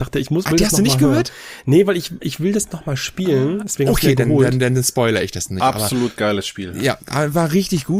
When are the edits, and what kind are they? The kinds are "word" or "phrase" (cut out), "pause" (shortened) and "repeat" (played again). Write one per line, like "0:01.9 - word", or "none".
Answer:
0:02.2 - word

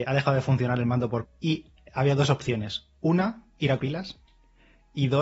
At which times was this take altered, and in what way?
0:01.2 - word
0:03.8 - word

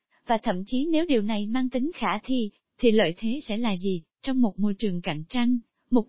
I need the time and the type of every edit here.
0:04.1 - pause

